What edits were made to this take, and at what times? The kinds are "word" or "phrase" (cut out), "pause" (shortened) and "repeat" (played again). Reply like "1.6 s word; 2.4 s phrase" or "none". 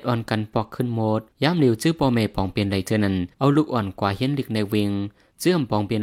1.3 s pause; 3.3 s pause